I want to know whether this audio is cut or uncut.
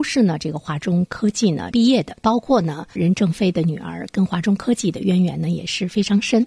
cut